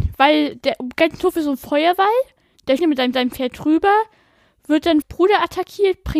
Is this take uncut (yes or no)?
no